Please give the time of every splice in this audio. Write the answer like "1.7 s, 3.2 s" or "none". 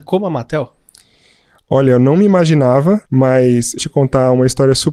3.1 s, 3.8 s